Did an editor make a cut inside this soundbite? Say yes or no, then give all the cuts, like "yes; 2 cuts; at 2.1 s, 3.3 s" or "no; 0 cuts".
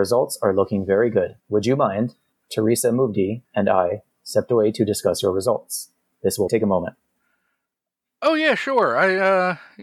yes; 4 cuts; at 1.4 s, 2.3 s, 3.4 s, 6.5 s